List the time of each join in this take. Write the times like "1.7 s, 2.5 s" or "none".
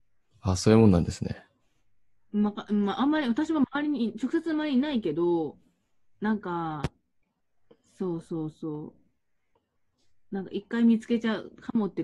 none